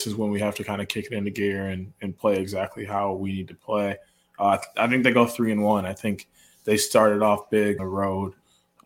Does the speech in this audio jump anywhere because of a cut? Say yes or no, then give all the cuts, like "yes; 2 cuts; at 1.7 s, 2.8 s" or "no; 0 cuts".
yes; 1 cut; at 7.8 s